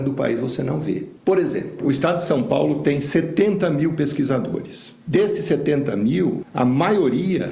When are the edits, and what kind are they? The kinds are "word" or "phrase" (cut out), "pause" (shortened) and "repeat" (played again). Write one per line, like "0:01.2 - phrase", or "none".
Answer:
0:05.0 - pause